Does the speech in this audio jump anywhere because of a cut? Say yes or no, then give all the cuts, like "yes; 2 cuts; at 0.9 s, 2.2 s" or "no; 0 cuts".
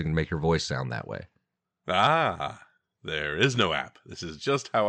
no; 0 cuts